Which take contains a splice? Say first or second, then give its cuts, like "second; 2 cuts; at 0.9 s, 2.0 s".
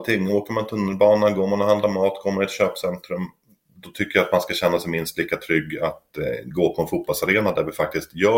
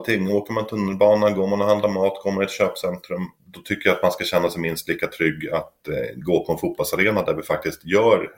second; 1 cut; at 3.4 s